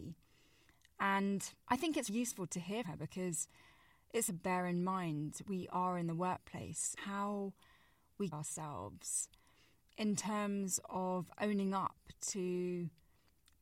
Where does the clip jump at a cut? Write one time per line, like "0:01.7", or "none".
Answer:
0:01.6
0:02.1
0:02.8
0:04.3
0:05.5
0:07.0
0:08.3